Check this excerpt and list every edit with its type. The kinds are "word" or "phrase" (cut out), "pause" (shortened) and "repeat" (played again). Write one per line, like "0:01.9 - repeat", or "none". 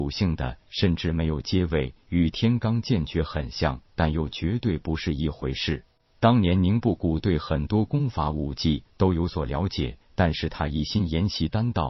none